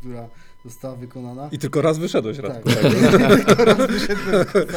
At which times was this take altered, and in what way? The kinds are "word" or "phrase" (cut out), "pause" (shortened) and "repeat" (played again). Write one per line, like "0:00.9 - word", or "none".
none